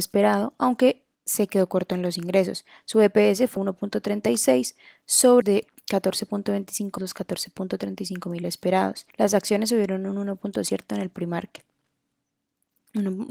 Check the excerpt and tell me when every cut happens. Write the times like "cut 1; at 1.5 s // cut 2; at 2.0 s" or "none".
cut 1; at 1.1 s // cut 2; at 3.6 s // cut 3; at 5.4 s // cut 4; at 7.0 s // cut 5; at 9.1 s

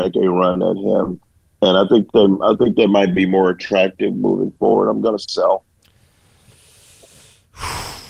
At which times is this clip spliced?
none

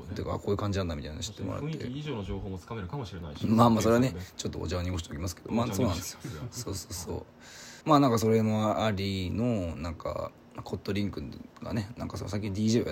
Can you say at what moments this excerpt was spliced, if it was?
cut 1; at 7.8 s

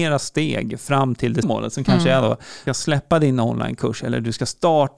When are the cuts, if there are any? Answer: cut 1; at 1.4 s // cut 2; at 2.7 s

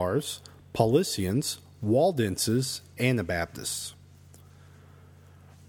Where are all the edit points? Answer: cut 1; at 3.0 s

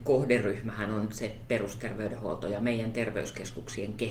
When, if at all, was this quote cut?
none

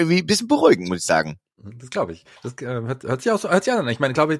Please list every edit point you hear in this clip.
cut 1; at 2.4 s

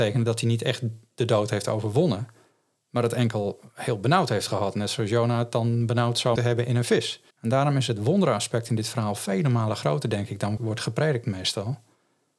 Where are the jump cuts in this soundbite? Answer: cut 1; at 6.4 s // cut 2; at 7.3 s // cut 3; at 10.6 s

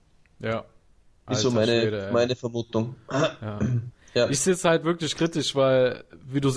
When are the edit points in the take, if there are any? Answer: none

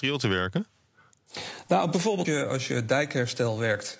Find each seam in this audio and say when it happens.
cut 1; at 2.2 s

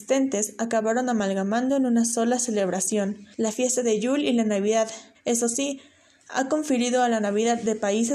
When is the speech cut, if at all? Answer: cut 1; at 3.3 s // cut 2; at 5.1 s

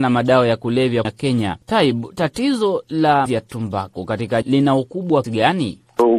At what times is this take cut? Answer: cut 1; at 1.0 s // cut 2; at 1.6 s // cut 3; at 3.3 s // cut 4; at 4.4 s // cut 5; at 5.2 s

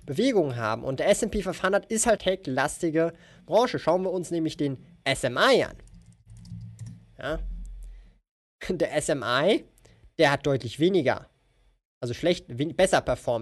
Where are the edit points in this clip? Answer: cut 1; at 2.2 s

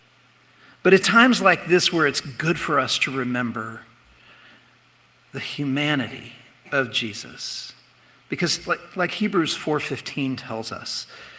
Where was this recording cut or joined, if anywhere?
cut 1; at 1.0 s

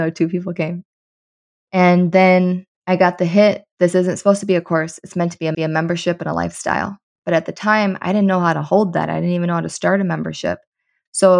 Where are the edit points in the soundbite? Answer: cut 1; at 5.5 s

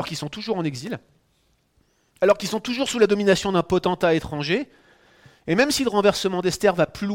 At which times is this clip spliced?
none

